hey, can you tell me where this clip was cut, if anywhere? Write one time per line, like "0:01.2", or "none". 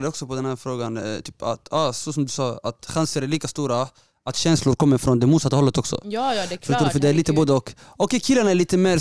none